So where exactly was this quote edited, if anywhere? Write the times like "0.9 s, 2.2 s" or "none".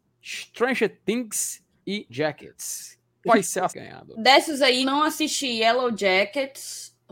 1.8 s, 2.1 s, 3.3 s, 3.7 s, 4.8 s